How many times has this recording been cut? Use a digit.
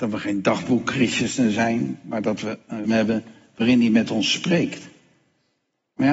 1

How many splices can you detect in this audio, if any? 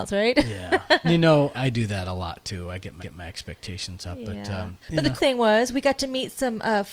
5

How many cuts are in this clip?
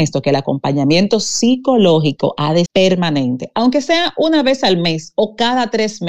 1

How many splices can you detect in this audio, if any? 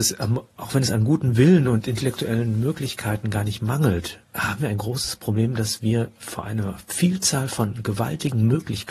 1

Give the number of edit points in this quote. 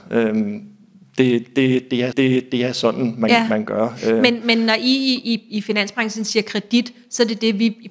1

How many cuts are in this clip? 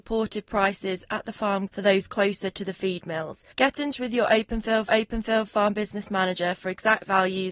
4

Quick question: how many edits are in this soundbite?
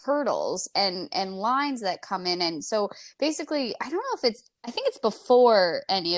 1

